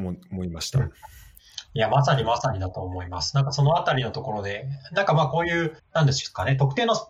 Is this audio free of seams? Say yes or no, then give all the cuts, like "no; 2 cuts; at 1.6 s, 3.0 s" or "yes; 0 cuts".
no; 1 cut; at 5.8 s